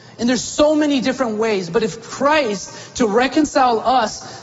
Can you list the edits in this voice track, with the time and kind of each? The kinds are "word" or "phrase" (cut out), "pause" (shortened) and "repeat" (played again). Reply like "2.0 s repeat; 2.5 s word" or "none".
none